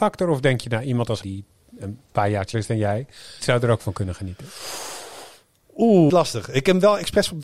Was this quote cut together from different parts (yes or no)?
yes